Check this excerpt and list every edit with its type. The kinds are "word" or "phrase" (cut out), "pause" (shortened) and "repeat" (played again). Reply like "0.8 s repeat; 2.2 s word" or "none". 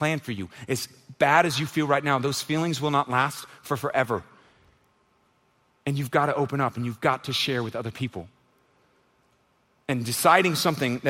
none

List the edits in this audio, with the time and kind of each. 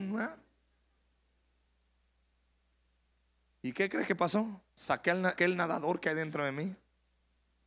4.7 s pause; 5.4 s word

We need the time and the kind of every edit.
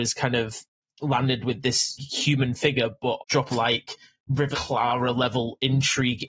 2.0 s word; 3.2 s phrase; 3.5 s phrase; 4.5 s word

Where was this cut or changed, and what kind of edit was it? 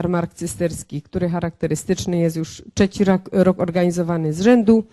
none

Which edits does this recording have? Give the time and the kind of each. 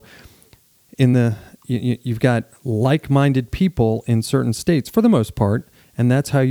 none

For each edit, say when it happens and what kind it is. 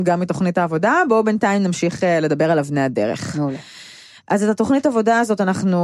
none

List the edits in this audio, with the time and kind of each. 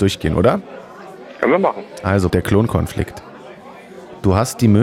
2.3 s phrase

